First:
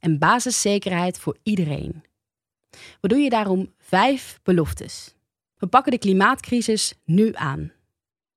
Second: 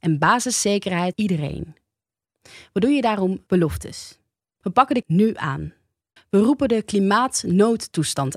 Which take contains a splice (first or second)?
second